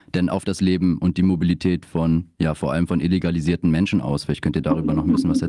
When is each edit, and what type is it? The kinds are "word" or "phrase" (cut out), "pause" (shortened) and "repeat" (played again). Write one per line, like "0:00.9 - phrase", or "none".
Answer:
none

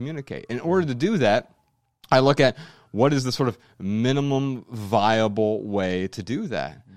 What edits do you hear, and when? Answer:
none

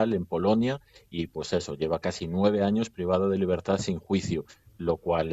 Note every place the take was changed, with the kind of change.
none

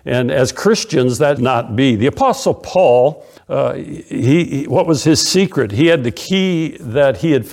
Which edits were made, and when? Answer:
0:01.4 - word
0:03.4 - pause

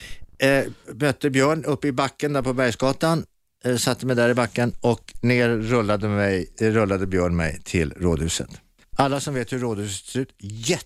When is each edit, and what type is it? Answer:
0:08.8 - pause

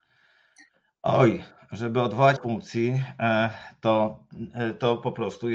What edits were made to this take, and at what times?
0:02.4 - phrase

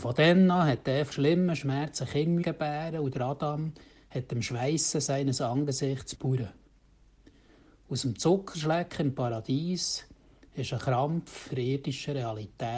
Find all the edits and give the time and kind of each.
0:01.1 - word
0:02.4 - word
0:06.1 - word
0:11.5 - word

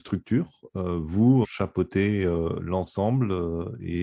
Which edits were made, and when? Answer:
0:01.4 - word

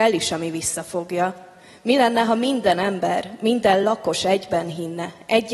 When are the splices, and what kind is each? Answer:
none

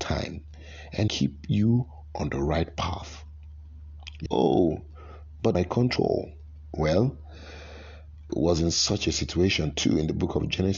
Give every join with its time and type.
0:01.1 - phrase
0:04.3 - phrase
0:05.5 - phrase
0:06.0 - phrase
0:08.3 - word

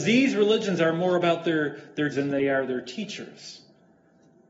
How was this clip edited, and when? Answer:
0:02.1 - word

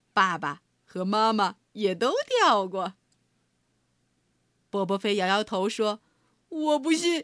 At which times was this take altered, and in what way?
0:01.6 - pause

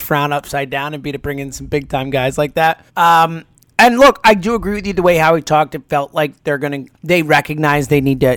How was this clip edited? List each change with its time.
0:02.9 - pause
0:06.9 - pause

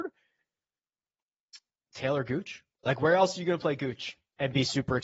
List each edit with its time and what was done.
0:02.7 - pause

